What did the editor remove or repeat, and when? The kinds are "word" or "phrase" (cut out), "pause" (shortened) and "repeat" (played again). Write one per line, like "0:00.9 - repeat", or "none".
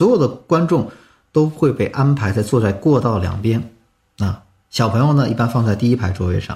none